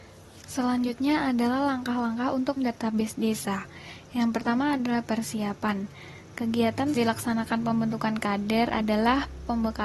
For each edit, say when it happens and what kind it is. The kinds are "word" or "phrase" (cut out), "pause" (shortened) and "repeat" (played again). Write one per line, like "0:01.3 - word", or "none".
0:02.6 - word
0:07.0 - word